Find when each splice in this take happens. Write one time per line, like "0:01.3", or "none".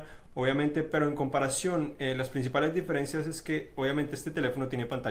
none

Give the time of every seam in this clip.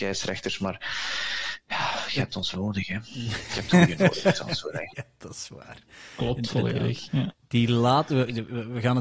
0:02.5

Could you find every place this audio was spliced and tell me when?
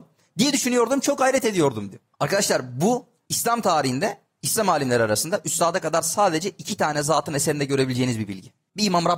none

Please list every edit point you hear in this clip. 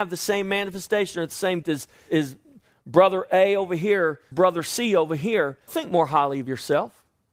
0:01.6
0:02.1
0:04.3
0:05.7

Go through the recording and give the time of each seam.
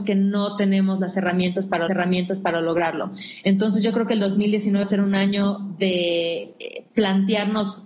0:01.9
0:04.8

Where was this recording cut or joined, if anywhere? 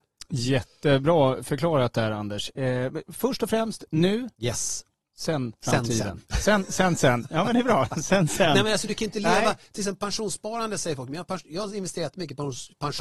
0:04.3
0:05.6

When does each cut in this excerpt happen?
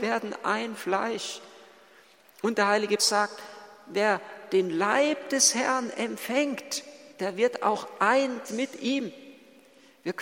0:03.0
0:07.1
0:08.4

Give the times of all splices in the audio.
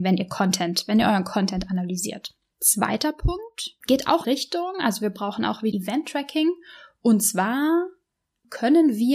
0:02.5
0:04.2
0:05.7

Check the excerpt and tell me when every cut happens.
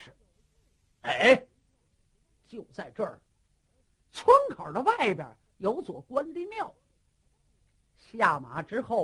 none

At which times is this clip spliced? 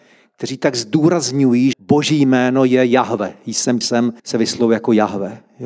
0:01.7
0:03.8
0:04.2

